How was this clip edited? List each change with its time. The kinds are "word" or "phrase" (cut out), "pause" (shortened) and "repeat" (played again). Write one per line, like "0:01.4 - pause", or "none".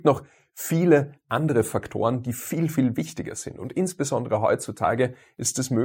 none